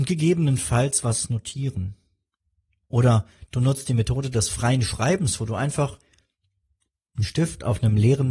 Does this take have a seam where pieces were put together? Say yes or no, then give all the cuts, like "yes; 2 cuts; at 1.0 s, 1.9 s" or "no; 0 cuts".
no; 0 cuts